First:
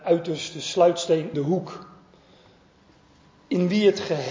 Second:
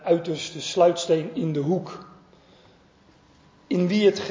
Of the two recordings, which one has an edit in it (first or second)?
first